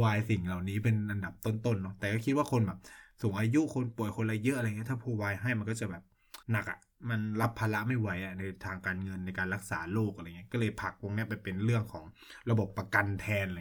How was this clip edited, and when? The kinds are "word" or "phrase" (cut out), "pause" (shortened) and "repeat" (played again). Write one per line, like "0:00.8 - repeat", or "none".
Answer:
0:06.4 - pause